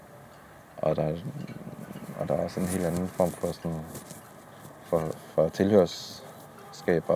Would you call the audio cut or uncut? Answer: uncut